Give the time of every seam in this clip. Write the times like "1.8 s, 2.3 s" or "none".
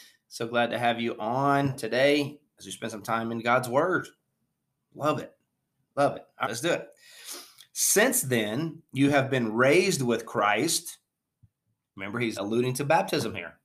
6.4 s, 12.4 s